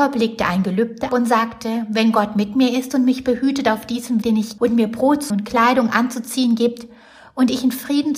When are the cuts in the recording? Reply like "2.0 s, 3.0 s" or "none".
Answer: 1.1 s, 4.2 s, 4.6 s, 5.3 s